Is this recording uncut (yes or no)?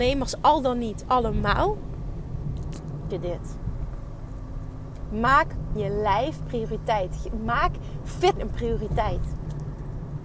no